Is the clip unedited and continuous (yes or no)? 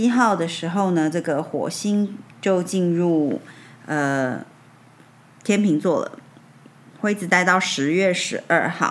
no